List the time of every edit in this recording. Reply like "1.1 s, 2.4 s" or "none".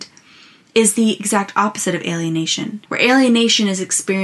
2.8 s

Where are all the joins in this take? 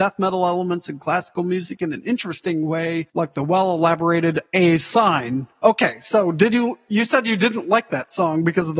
3.1 s, 4.5 s

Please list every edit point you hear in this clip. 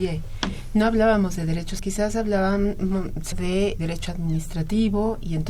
1.8 s, 3.3 s, 3.8 s

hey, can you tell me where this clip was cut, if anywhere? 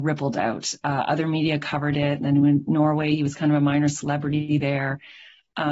none

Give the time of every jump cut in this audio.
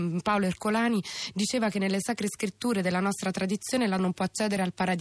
4.0 s

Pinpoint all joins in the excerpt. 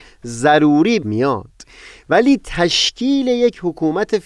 1.0 s

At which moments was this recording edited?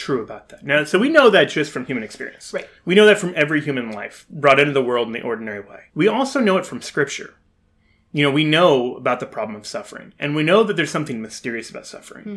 2.8 s, 5.9 s

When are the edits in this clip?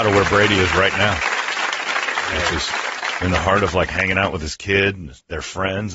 none

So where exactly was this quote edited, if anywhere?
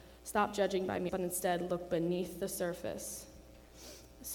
1.1 s

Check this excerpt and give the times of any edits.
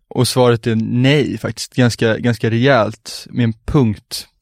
none

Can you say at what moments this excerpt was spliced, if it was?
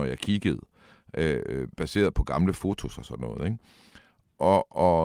1.7 s

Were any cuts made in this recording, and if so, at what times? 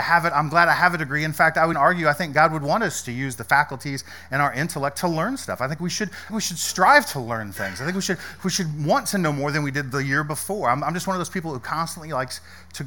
1.7 s, 6.3 s

